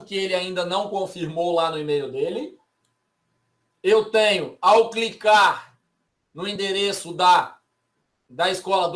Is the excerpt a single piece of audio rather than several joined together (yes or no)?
yes